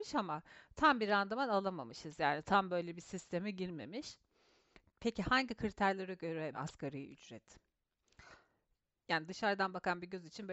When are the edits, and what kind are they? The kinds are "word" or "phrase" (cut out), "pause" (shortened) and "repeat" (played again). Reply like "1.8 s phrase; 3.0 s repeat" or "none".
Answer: 6.5 s word

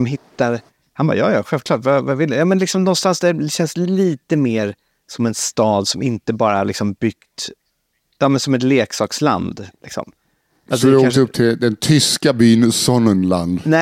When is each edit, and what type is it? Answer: none

